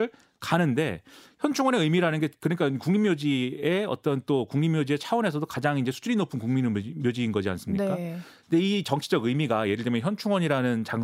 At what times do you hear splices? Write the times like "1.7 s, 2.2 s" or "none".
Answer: none